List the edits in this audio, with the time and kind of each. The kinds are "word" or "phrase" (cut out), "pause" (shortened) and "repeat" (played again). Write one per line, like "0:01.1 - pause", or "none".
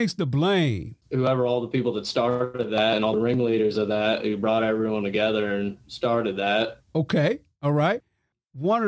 0:01.0 - pause
0:06.9 - pause